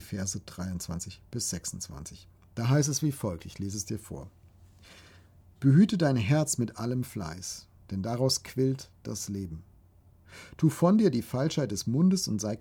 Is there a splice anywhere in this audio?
no; 0 cuts

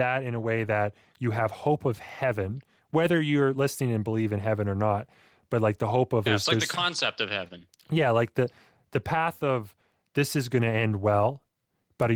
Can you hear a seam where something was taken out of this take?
yes; 1 cut; at 6.3 s

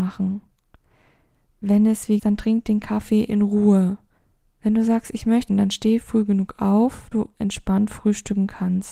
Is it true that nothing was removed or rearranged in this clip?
no; 4 cuts; at 2.2 s, 4.2 s, 5.5 s, 7.1 s

